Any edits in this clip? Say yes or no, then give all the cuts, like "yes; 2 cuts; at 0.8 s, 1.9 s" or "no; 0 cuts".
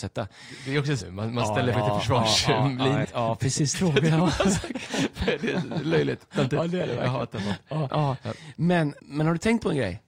yes; 6 cuts; at 1.0 s, 1.7 s, 3.0 s, 3.7 s, 7.9 s, 9.0 s